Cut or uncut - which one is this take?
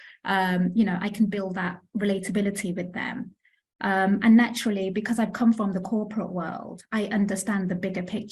uncut